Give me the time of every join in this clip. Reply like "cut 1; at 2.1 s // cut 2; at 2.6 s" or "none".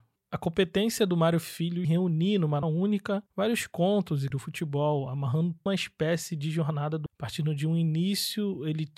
cut 1; at 1.8 s // cut 2; at 2.6 s // cut 3; at 3.3 s // cut 4; at 4.3 s // cut 5; at 5.7 s // cut 6; at 7.1 s